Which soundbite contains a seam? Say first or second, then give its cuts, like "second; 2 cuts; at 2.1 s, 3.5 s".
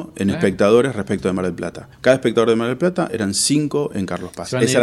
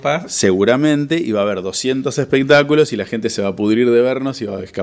first; 1 cut; at 1.9 s